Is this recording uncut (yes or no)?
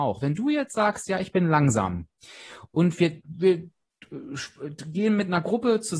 yes